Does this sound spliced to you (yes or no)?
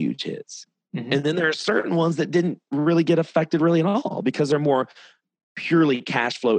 no